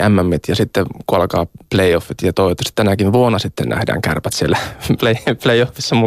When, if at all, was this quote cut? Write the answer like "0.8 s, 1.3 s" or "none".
5.0 s